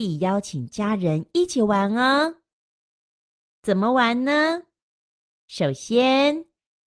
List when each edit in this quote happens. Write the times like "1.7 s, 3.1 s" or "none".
none